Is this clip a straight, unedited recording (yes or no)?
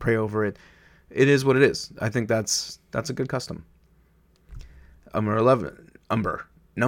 yes